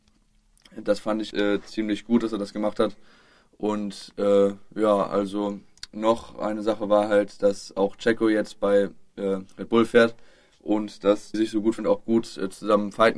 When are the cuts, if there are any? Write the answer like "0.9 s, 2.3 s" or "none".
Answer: 1.3 s, 11.3 s, 11.8 s